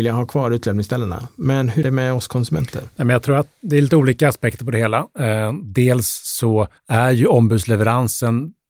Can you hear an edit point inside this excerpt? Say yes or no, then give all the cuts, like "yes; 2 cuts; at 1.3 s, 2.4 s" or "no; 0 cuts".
yes; 2 cuts; at 1.8 s, 6.8 s